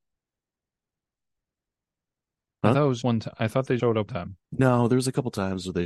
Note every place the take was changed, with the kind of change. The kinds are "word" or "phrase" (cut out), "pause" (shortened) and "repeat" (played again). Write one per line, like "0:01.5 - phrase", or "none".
0:03.0 - word
0:03.8 - word
0:04.1 - word
0:04.4 - pause